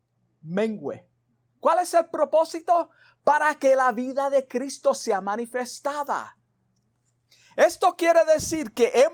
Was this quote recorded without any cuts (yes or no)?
yes